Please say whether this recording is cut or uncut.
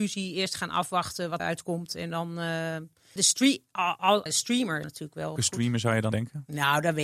cut